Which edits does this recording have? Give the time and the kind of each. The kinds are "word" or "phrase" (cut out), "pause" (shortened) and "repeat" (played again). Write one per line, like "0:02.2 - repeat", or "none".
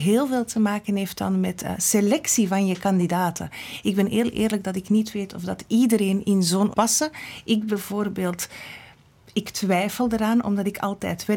0:06.7 - phrase